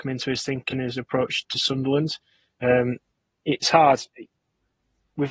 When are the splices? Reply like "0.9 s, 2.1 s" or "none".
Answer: 1.4 s, 3.6 s